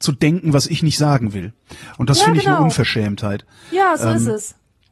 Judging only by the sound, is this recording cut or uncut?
uncut